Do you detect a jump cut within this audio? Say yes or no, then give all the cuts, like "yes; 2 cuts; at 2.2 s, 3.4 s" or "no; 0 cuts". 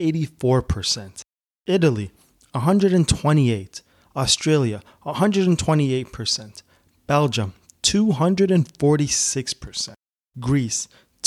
no; 0 cuts